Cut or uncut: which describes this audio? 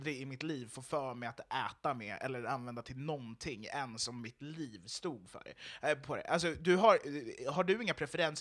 uncut